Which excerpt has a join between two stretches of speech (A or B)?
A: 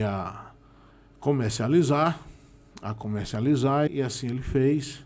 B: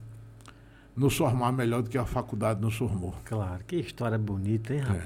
A